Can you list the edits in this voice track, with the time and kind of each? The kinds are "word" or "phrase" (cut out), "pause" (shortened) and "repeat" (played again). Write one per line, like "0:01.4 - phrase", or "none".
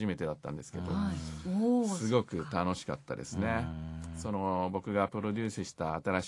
none